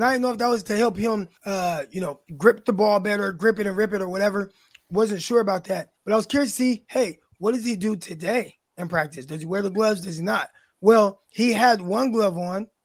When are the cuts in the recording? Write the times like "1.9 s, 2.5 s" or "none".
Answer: 1.4 s, 2.3 s, 6.0 s, 11.2 s